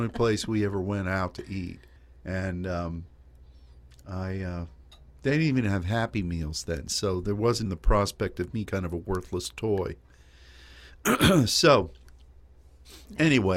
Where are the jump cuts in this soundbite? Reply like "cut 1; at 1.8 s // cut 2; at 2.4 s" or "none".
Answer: cut 1; at 2.0 s // cut 2; at 7.7 s // cut 3; at 8.7 s